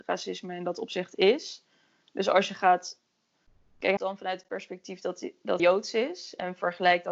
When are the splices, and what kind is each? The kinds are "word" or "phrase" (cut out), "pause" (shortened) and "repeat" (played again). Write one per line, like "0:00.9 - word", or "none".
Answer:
0:04.0 - phrase
0:05.6 - word